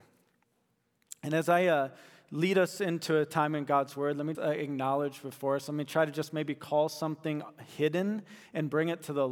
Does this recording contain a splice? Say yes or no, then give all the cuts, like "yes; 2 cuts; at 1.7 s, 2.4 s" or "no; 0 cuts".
yes; 1 cut; at 4.3 s